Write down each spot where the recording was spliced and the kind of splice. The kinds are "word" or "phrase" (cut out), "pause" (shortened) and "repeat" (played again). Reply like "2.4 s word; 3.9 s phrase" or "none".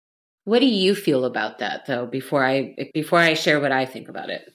2.9 s pause

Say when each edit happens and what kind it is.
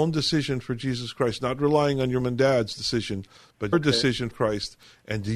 2.2 s word; 3.7 s word; 4.3 s word

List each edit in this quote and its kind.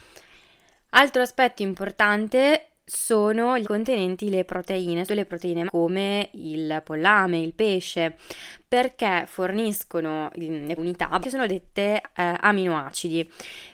3.6 s word; 5.1 s word; 5.7 s word; 10.8 s phrase; 11.2 s word

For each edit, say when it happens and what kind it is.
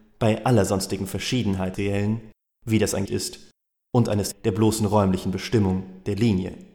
1.7 s word; 3.1 s word; 4.3 s word

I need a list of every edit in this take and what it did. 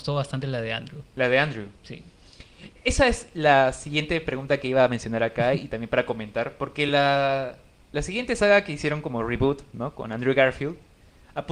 none

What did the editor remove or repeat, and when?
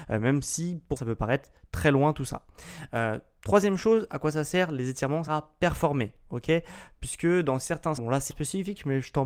1.0 s word; 5.3 s word; 8.0 s word; 8.3 s word

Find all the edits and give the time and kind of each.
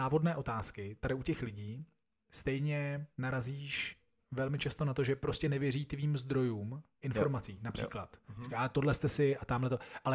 none

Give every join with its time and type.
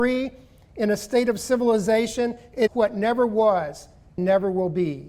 2.7 s word; 4.2 s word

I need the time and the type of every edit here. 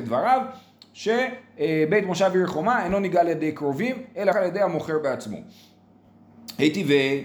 4.3 s word

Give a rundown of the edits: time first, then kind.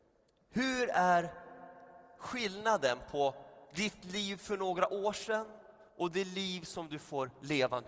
3.6 s pause; 5.9 s pause

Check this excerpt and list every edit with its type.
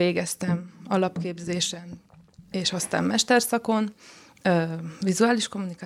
none

